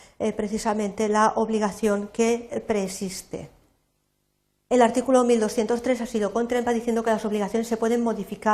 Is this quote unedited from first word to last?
yes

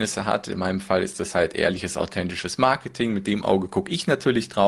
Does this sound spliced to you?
no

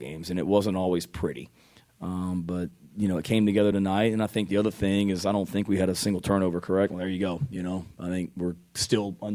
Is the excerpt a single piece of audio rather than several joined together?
yes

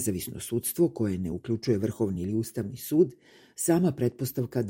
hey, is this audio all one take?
yes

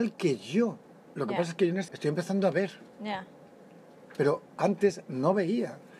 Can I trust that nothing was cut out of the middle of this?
no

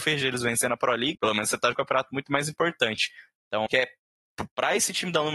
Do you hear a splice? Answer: yes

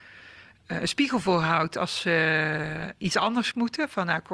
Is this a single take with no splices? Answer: yes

